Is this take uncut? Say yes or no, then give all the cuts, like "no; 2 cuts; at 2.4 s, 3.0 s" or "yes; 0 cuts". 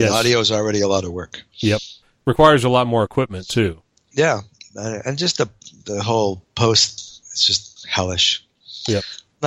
yes; 0 cuts